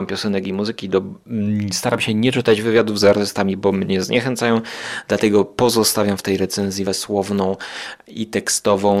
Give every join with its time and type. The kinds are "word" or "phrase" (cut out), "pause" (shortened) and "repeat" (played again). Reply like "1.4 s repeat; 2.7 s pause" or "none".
6.9 s word